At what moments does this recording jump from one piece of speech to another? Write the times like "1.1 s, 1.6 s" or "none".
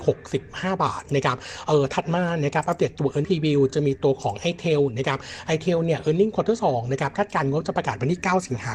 3.2 s